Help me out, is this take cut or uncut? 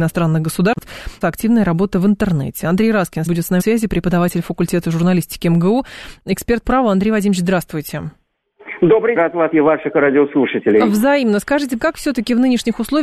cut